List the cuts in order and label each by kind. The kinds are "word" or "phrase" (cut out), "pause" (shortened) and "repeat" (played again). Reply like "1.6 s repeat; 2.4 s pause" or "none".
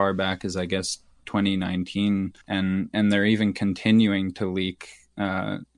2.4 s pause